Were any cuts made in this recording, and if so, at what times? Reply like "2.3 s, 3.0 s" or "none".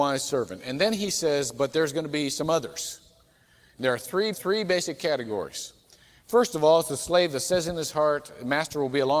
4.3 s